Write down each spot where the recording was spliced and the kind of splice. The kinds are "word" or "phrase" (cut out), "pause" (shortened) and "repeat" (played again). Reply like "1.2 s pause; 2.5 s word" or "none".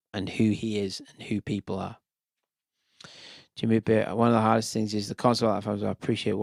none